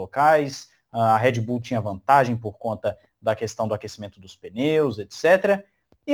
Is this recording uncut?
yes; 0 cuts

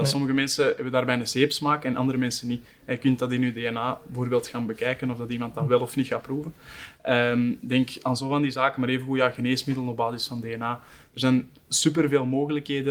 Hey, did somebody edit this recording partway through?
no; 0 cuts

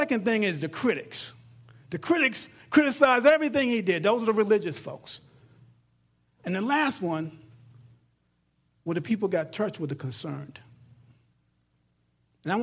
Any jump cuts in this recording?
no; 0 cuts

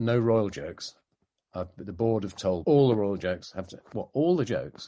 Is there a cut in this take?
yes; 1 cut; at 2.6 s

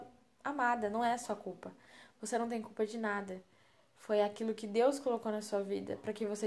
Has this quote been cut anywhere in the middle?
no; 0 cuts

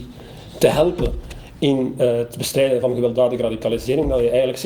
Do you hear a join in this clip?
no; 0 cuts

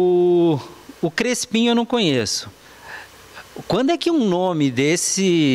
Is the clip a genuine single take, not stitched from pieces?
yes; 0 cuts

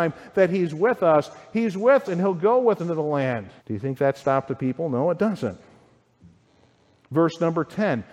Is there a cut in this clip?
yes; 3 cuts; at 2.0 s, 2.8 s, 3.6 s

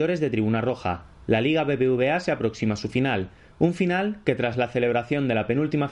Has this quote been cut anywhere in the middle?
no; 0 cuts

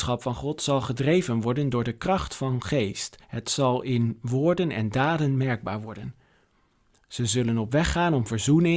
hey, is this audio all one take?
no; 1 cut; at 3.2 s

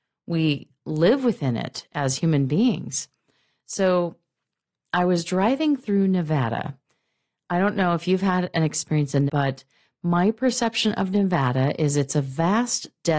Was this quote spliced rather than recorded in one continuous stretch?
yes; 1 cut; at 9.3 s

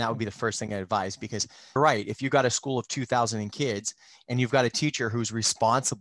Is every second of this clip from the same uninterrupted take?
no; 1 cut; at 1.8 s

